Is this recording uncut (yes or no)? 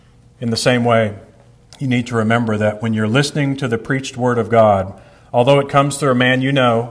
no